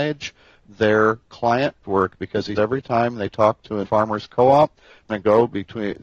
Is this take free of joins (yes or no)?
no